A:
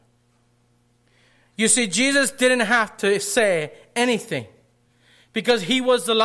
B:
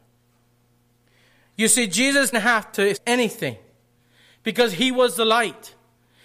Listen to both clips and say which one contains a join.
B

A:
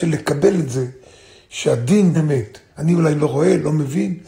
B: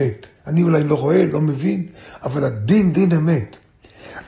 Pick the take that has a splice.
A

